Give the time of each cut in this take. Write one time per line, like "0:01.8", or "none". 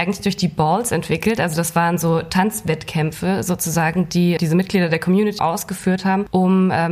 0:04.4
0:05.4

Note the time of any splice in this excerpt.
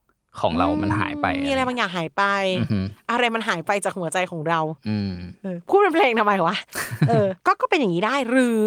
0:07.4

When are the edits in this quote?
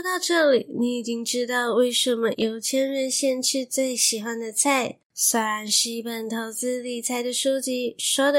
0:05.0

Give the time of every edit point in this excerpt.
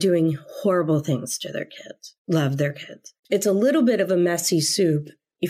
0:02.2
0:03.2

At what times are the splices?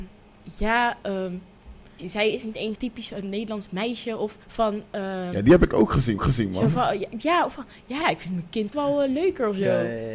0:02.0
0:02.7
0:04.4
0:06.2
0:08.0
0:08.7

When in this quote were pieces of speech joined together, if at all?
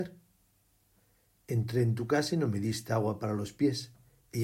none

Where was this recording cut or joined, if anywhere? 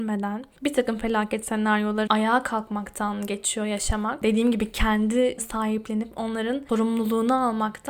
0:02.1
0:05.4

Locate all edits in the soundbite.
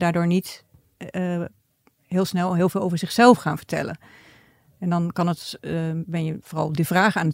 none

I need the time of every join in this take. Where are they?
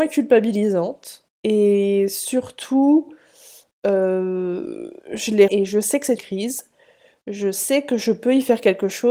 0:01.3
0:05.0
0:05.5
0:06.2

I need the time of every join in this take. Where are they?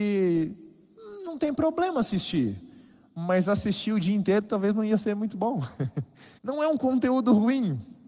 0:06.4

